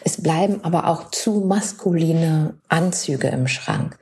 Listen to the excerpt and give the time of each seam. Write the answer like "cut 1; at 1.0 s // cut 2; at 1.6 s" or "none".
cut 1; at 2.6 s